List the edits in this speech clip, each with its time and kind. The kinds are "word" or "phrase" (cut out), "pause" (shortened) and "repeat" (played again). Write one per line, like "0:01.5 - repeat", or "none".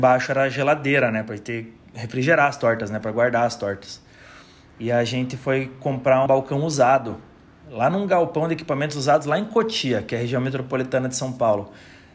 0:06.3 - word